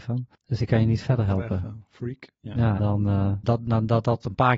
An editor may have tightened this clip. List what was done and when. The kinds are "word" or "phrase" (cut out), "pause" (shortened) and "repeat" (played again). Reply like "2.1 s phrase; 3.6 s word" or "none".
2.8 s word; 3.4 s word

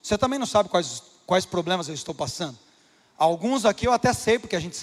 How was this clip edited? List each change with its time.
none

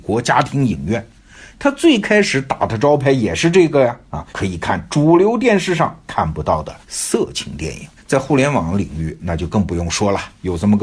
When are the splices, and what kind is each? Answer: 4.3 s pause; 6.8 s pause; 8.0 s pause

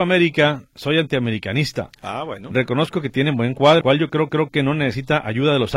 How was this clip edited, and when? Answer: 3.8 s word; 4.3 s repeat

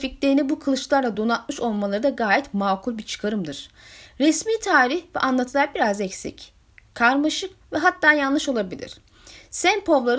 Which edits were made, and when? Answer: none

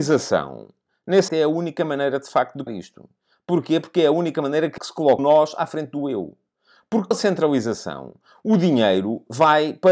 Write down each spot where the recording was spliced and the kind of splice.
1.3 s word; 2.7 s word; 4.8 s word; 5.2 s word; 7.1 s word

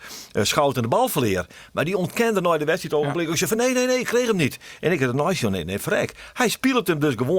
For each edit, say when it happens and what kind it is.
none

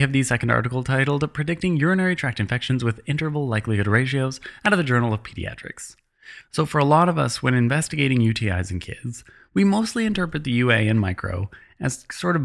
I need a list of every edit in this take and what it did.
none

